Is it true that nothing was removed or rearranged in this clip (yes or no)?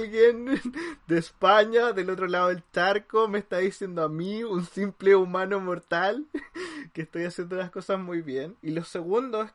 no